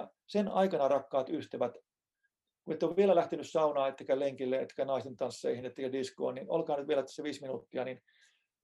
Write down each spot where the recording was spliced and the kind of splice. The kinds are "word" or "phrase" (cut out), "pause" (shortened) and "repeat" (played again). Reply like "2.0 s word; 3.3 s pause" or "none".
none